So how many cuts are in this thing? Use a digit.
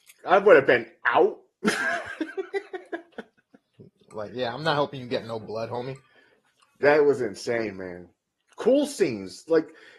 0